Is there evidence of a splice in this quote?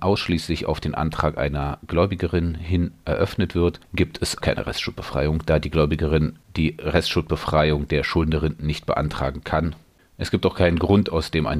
yes; 1 cut; at 4.4 s

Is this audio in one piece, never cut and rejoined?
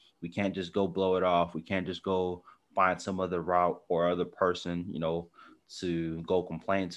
yes; 0 cuts

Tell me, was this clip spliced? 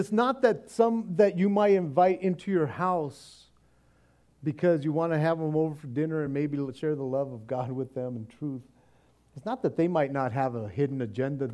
no; 0 cuts

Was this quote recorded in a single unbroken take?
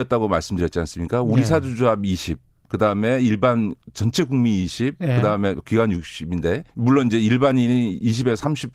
no; 1 cut; at 6.7 s

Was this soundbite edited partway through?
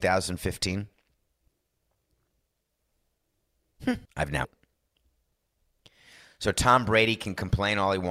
yes; 2 cuts; at 4.0 s, 4.4 s

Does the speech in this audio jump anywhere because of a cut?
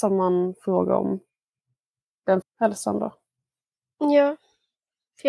yes; 1 cut; at 2.4 s

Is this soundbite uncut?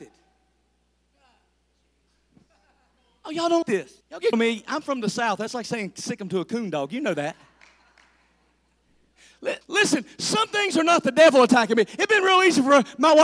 no; 4 cuts; at 3.6 s, 4.0 s, 4.3 s, 9.6 s

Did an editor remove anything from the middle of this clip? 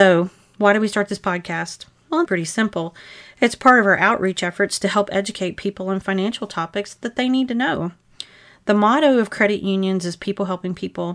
yes; 1 cut; at 2.3 s

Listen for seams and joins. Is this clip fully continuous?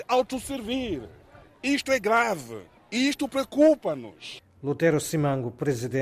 yes; 0 cuts

